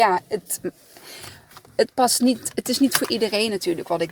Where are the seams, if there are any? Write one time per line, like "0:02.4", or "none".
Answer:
none